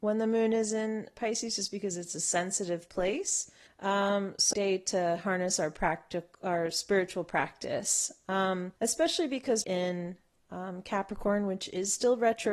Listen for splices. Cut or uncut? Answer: cut